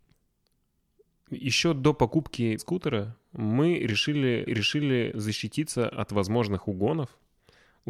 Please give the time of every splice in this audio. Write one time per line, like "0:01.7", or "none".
0:02.6
0:04.5